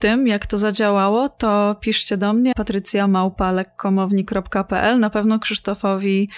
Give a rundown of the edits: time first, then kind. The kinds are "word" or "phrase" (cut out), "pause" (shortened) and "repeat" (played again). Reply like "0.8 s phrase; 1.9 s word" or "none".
2.5 s word